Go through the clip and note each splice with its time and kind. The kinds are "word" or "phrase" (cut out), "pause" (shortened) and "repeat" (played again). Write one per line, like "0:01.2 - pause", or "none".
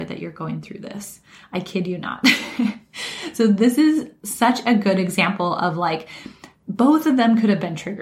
none